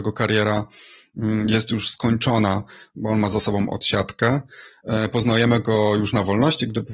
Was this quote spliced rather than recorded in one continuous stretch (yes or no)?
no